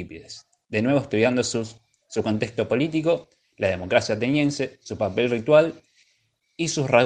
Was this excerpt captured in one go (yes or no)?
yes